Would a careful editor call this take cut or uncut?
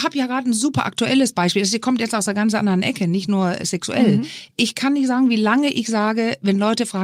uncut